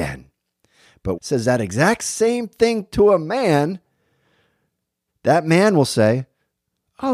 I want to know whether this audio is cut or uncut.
cut